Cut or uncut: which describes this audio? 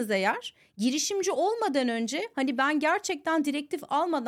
uncut